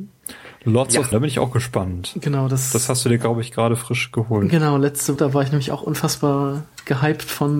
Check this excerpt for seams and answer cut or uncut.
cut